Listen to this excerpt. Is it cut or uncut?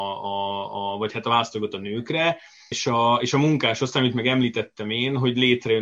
uncut